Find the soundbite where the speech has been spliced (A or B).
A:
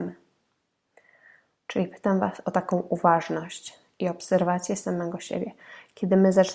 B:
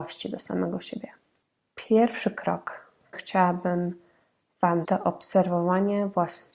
B